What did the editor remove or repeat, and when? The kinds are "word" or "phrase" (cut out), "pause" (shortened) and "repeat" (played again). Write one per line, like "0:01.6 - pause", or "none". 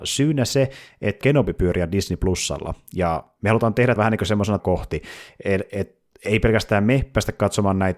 0:01.2 - phrase
0:04.0 - word
0:04.6 - phrase